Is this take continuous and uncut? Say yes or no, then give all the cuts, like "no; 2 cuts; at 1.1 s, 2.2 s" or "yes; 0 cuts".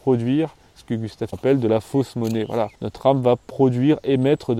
no; 2 cuts; at 1.3 s, 2.8 s